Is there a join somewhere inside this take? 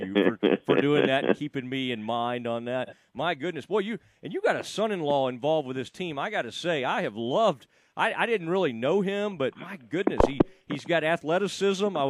no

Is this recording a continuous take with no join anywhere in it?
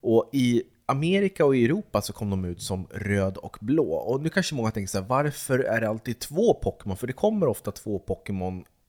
yes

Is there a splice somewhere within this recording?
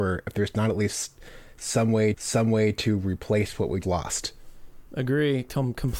yes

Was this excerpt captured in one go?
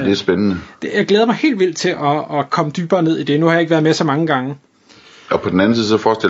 yes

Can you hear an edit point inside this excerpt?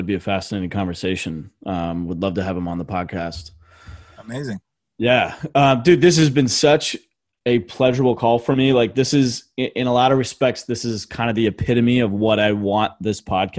no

